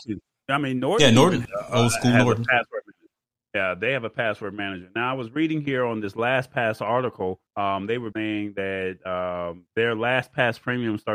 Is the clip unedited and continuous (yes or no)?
no